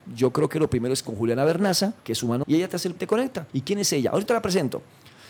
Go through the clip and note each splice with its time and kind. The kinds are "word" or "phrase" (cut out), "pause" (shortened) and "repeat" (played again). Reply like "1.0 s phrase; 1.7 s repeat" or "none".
1.0 s word; 2.0 s pause; 2.4 s word; 3.0 s word; 3.5 s pause; 4.3 s phrase